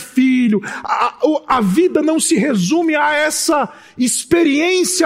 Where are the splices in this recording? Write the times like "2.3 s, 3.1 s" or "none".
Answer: none